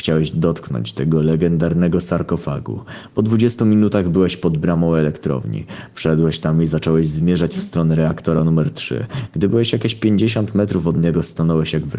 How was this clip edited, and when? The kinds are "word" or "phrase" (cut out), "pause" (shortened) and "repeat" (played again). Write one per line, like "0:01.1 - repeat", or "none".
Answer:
none